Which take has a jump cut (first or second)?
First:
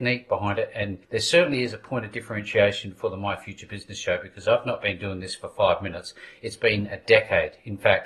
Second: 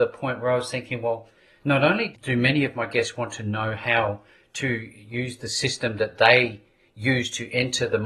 first